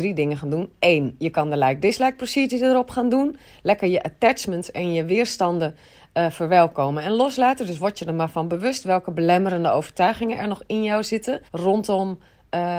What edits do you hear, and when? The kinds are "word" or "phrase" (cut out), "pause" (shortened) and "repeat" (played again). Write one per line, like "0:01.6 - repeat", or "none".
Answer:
0:11.5 - pause